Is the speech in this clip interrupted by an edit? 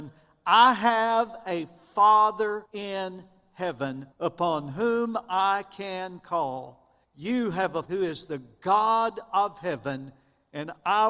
yes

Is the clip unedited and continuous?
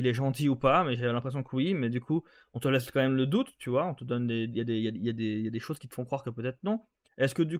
yes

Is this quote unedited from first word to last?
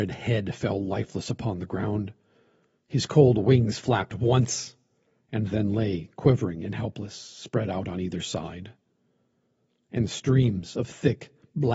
yes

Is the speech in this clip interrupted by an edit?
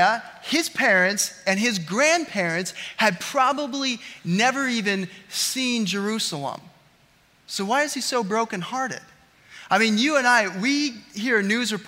no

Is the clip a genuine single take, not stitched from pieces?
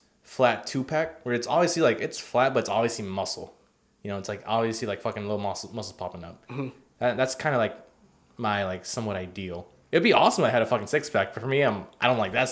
yes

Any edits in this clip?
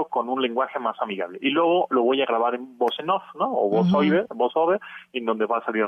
no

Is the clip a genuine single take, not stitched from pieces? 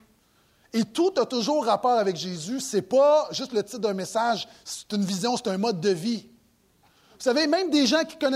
yes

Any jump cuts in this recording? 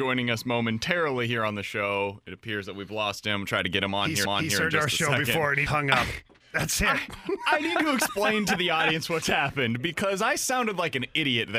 yes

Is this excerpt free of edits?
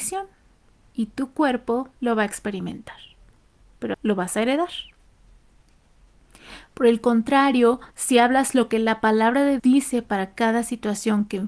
no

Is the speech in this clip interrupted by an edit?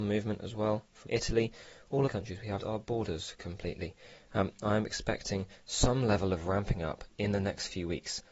yes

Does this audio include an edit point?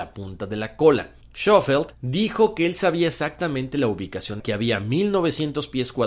yes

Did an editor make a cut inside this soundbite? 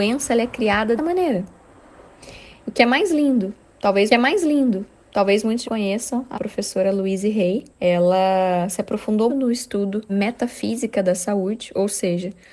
yes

